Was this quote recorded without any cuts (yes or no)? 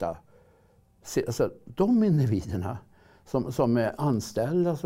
yes